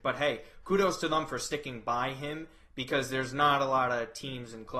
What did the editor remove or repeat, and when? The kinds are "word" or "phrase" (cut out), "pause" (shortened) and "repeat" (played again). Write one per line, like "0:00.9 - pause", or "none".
none